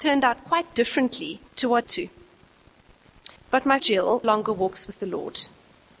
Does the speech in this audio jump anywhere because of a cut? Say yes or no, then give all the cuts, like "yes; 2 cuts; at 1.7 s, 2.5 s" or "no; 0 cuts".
yes; 5 cuts; at 1.5 s, 1.8 s, 3.4 s, 3.8 s, 4.2 s